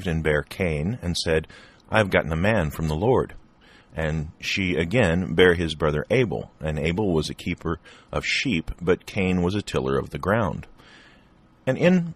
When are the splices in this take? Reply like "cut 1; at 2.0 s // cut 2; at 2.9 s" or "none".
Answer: none